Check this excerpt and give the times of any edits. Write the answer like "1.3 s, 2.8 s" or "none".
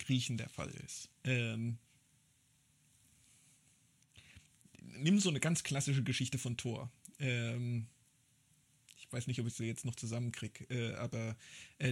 1.2 s